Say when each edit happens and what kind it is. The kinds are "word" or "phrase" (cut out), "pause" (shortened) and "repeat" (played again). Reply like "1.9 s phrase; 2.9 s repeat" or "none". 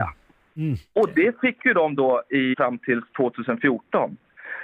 2.5 s word

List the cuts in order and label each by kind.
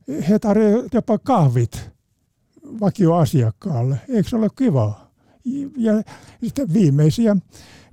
0.9 s word

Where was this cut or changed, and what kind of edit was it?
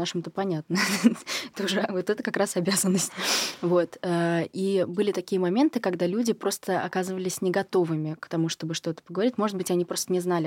none

